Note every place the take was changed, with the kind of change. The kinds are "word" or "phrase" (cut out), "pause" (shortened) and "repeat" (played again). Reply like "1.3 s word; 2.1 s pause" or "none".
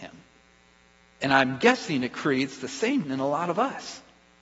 3.0 s word